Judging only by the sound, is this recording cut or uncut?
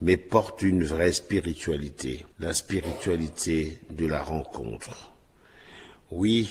cut